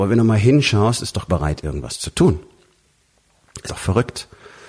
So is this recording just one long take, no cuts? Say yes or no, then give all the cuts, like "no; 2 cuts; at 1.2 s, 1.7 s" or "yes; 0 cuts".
no; 2 cuts; at 1.3 s, 3.7 s